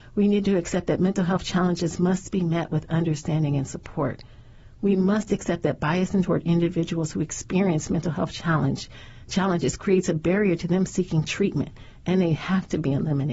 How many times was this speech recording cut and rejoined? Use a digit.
1